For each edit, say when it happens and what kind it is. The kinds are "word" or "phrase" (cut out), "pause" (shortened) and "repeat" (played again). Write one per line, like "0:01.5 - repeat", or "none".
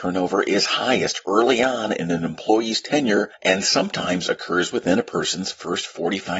none